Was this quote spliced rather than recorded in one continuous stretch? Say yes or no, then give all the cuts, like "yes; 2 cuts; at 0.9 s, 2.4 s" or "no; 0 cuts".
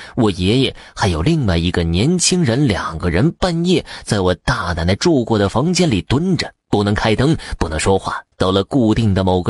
yes; 2 cuts; at 6.6 s, 8.3 s